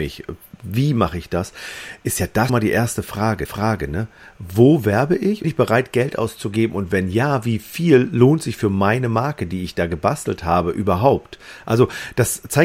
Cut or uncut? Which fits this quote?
cut